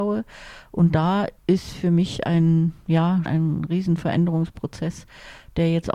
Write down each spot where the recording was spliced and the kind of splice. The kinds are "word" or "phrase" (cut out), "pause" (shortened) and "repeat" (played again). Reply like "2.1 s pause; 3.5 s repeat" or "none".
1.4 s pause; 3.3 s word